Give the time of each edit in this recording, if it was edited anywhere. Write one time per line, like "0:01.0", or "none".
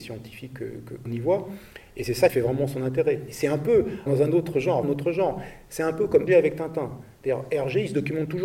0:01.1
0:02.3
0:04.1
0:04.8
0:06.3